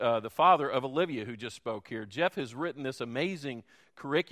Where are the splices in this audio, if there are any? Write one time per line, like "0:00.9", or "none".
none